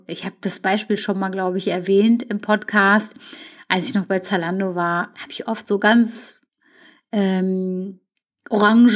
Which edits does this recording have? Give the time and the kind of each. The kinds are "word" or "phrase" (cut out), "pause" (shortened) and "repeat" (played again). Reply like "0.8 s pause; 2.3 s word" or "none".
none